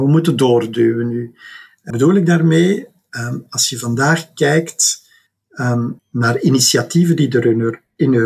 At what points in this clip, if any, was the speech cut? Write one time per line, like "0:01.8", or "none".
0:01.9
0:06.0